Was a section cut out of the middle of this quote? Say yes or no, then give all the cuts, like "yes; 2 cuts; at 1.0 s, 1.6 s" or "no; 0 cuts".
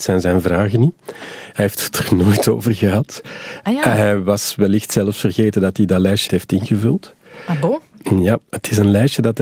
yes; 1 cut; at 6.3 s